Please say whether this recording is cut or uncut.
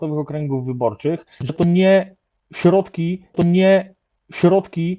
cut